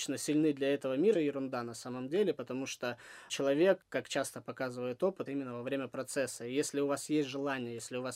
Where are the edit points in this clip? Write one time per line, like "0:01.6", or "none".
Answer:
0:01.1
0:05.3